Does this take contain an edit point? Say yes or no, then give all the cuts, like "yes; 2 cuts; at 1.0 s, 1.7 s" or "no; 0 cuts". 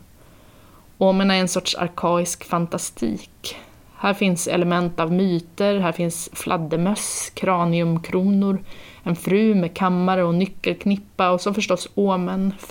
no; 0 cuts